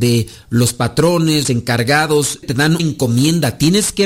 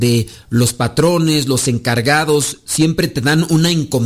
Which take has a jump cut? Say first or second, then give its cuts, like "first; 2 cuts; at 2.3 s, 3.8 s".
first; 3 cuts; at 1.4 s, 2.4 s, 2.8 s